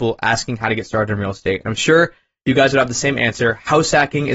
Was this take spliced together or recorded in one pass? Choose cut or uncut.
uncut